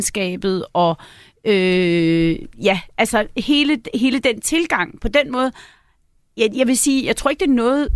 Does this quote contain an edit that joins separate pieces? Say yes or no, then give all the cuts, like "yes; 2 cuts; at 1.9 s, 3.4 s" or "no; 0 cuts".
no; 0 cuts